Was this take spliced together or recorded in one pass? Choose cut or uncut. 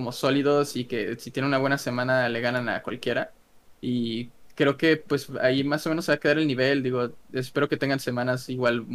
uncut